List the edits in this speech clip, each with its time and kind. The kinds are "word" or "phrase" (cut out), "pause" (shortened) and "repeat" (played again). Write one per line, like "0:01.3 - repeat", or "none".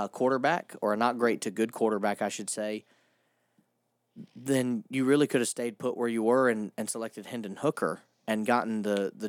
0:04.3 - pause